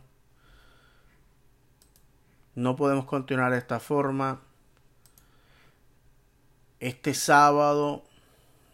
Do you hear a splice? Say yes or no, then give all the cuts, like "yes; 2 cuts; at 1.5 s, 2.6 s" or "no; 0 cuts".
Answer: no; 0 cuts